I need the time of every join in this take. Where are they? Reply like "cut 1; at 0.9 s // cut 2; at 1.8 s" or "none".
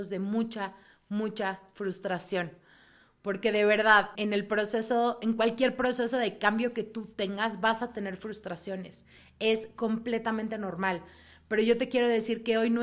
cut 1; at 4.1 s